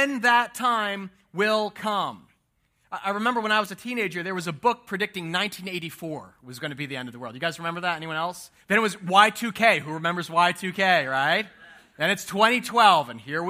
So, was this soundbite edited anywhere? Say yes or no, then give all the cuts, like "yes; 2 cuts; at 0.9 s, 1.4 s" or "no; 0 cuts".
yes; 1 cut; at 8.6 s